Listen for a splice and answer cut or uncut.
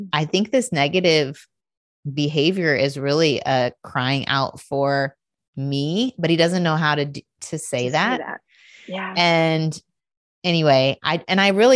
uncut